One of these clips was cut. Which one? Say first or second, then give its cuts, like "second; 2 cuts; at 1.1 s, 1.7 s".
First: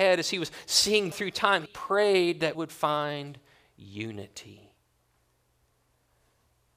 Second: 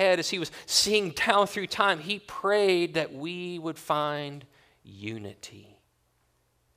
first; 3 cuts; at 1.1 s, 1.7 s, 2.5 s